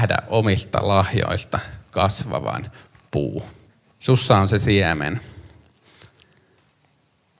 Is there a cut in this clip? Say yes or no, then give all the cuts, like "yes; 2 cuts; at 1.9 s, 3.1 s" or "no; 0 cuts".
yes; 1 cut; at 3.7 s